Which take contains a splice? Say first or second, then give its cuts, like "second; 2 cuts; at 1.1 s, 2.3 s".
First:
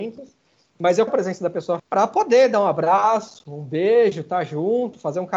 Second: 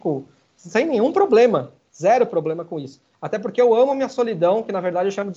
first; 2 cuts; at 1.1 s, 1.8 s